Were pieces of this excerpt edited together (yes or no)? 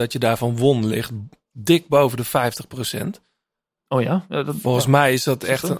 no